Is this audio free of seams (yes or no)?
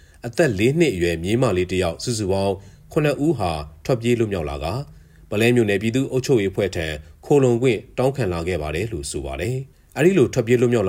yes